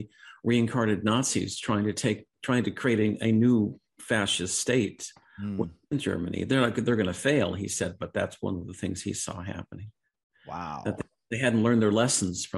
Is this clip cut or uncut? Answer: uncut